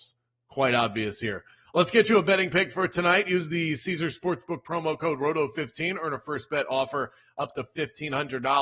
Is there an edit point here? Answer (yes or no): no